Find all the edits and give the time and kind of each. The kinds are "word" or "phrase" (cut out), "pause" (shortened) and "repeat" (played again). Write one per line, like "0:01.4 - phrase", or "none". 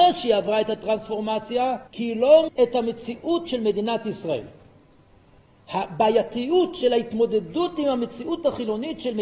0:01.9 - pause
0:02.5 - phrase
0:03.5 - word